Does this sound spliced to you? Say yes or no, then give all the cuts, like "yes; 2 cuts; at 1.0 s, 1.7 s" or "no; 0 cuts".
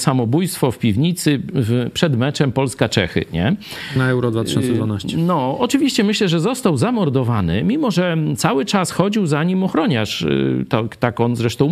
no; 0 cuts